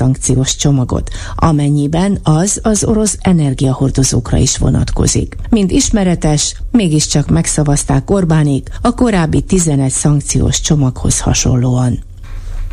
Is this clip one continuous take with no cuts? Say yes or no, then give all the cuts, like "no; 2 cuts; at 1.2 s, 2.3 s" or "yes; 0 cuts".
yes; 0 cuts